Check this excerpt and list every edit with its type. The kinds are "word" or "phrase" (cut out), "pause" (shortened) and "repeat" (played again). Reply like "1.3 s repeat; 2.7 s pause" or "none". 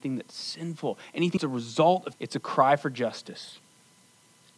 1.4 s word; 2.1 s word